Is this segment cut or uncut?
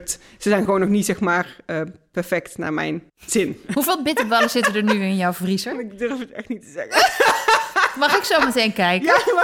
cut